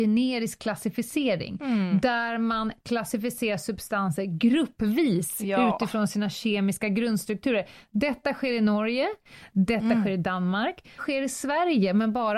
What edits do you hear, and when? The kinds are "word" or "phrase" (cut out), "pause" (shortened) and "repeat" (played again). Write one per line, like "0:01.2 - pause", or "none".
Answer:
0:11.0 - word